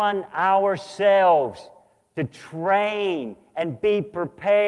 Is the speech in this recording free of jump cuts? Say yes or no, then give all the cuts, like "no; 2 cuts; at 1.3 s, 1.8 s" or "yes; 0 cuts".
yes; 0 cuts